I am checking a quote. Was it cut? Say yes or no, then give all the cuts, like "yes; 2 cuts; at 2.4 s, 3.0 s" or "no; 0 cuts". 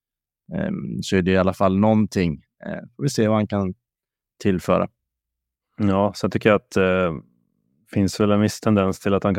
no; 0 cuts